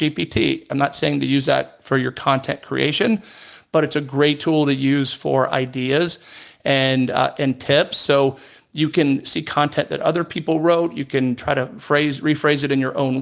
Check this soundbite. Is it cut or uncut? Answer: uncut